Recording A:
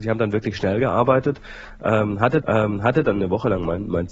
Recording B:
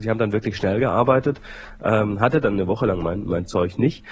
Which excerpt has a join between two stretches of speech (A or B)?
A